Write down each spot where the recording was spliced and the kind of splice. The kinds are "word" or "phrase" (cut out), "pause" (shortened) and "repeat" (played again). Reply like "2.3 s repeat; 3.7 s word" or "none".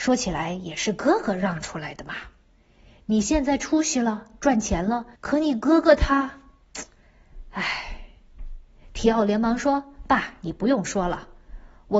5.1 s pause